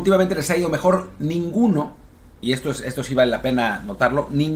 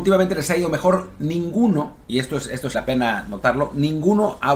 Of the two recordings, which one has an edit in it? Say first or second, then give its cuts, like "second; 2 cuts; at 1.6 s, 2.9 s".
second; 2 cuts; at 2.0 s, 2.7 s